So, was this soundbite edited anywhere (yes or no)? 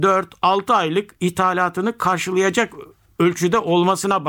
no